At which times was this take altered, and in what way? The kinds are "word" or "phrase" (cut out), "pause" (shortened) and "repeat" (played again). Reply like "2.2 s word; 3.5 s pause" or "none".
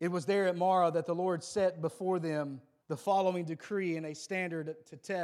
2.8 s pause